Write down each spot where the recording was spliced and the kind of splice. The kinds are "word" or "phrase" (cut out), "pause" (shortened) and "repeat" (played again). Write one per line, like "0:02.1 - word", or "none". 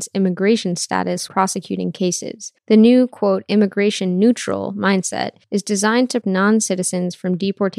0:01.3 - word
0:02.6 - pause
0:05.4 - pause
0:06.2 - word